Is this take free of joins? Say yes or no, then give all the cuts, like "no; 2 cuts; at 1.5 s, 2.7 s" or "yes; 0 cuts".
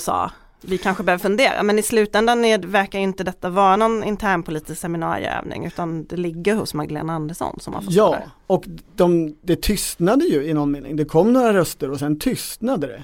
yes; 0 cuts